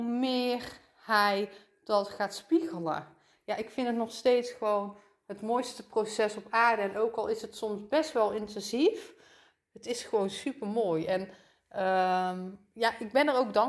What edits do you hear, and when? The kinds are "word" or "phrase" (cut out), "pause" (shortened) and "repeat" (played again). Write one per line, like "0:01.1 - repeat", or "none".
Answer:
none